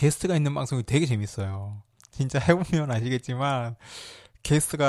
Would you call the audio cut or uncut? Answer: uncut